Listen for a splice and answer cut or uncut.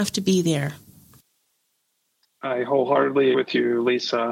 cut